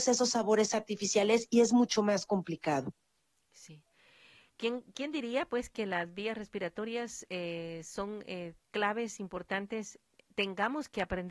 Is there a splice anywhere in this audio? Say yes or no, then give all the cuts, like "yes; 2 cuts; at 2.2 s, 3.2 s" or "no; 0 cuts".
no; 0 cuts